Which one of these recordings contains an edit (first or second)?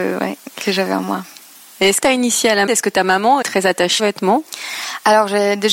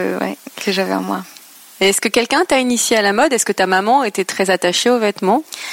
first